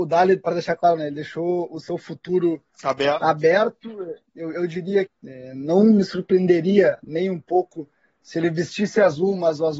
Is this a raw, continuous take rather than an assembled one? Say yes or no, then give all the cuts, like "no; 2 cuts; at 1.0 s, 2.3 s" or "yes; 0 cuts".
no; 1 cut; at 5.1 s